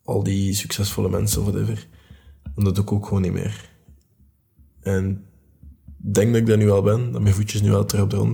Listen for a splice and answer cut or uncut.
uncut